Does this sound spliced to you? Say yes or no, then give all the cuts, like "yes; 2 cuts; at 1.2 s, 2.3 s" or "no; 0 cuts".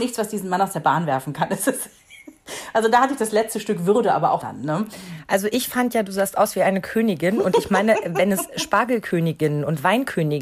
yes; 1 cut; at 4.4 s